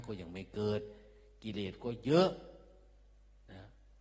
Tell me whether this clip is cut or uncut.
uncut